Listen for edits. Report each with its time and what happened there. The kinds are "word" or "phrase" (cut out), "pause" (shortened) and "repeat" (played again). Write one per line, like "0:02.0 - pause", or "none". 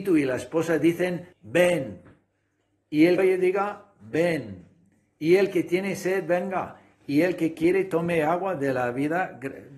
0:01.3 - pause
0:03.2 - word